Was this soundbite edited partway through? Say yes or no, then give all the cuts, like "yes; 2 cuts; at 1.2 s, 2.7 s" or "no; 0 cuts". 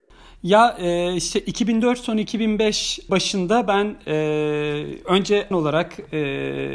yes; 2 cuts; at 3.1 s, 5.5 s